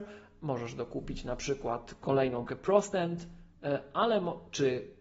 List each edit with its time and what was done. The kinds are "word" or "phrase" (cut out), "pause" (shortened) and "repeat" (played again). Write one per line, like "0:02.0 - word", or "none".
0:02.5 - word